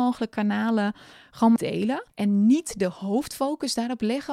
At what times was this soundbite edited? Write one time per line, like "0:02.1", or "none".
0:01.6